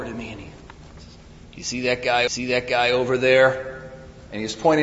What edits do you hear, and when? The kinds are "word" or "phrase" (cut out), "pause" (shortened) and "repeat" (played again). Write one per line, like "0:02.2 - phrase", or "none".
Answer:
0:02.3 - repeat